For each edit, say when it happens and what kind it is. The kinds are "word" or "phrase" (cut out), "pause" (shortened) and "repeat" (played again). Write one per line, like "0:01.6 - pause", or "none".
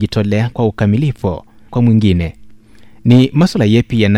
0:01.7 - word